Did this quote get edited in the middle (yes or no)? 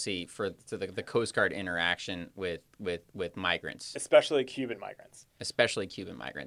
yes